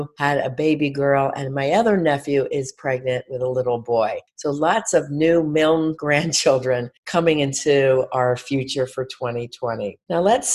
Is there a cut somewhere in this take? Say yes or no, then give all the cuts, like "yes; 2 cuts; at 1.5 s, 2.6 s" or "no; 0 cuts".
yes; 1 cut; at 7.0 s